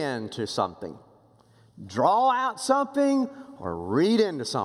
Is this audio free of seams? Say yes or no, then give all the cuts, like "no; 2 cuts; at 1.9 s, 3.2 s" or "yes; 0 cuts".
yes; 0 cuts